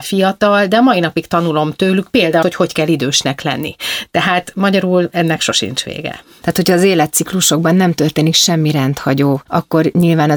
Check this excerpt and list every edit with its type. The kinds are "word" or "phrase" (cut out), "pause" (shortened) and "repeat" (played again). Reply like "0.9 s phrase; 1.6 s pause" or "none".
2.4 s word